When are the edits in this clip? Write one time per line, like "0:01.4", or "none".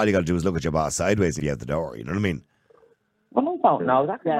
0:01.4